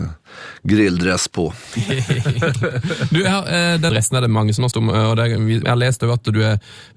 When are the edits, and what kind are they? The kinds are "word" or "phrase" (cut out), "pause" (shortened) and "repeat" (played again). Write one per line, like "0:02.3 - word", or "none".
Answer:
0:03.9 - phrase
0:04.7 - word
0:05.6 - word